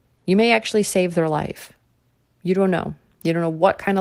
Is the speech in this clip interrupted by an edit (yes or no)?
no